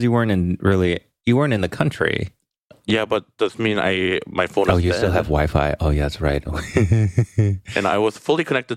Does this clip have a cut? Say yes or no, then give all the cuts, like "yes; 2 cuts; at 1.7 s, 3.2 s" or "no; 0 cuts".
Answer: no; 0 cuts